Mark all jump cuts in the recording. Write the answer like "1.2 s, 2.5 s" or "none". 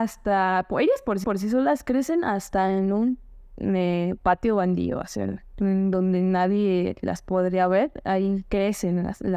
1.2 s